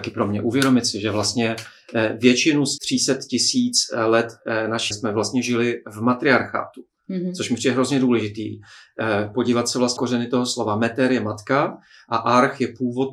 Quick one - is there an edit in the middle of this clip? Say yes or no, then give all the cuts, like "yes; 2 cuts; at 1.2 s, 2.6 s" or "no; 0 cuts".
yes; 3 cuts; at 2.8 s, 4.9 s, 10.0 s